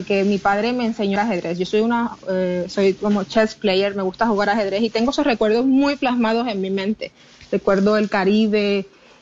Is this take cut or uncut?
cut